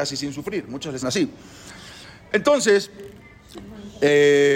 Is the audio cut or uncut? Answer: cut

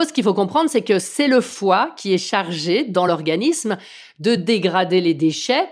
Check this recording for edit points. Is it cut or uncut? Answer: uncut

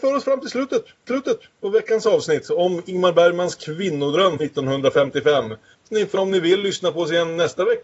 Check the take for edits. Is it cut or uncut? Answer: cut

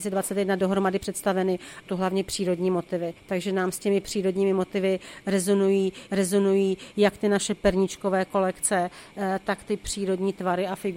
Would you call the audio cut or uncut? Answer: cut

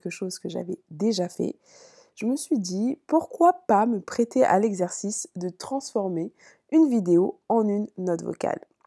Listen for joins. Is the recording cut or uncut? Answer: uncut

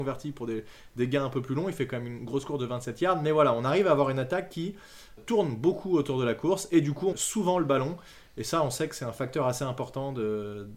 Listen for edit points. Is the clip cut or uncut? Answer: cut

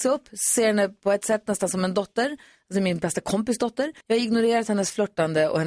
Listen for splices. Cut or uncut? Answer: cut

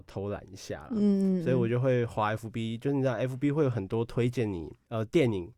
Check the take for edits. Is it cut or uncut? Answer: uncut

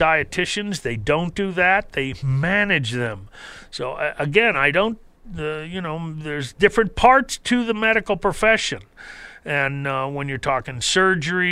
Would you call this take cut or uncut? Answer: uncut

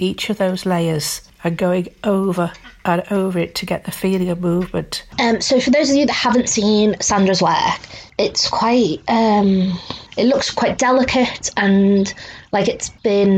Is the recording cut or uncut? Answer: uncut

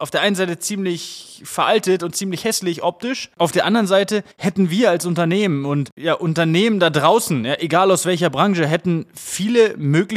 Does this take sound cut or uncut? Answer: cut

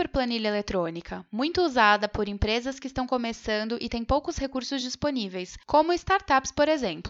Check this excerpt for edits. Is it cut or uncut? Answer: uncut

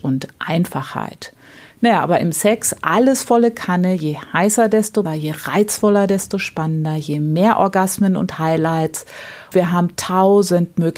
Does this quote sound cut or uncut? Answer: cut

